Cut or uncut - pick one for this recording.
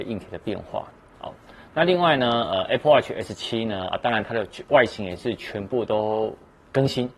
uncut